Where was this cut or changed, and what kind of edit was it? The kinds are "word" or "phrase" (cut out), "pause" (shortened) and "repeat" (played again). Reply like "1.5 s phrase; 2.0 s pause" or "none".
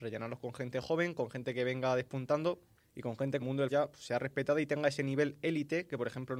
3.4 s phrase; 3.7 s word